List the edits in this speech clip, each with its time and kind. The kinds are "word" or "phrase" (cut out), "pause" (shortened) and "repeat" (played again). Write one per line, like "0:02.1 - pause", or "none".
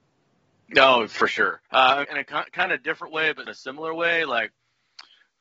0:01.7 - pause
0:02.0 - word
0:03.5 - word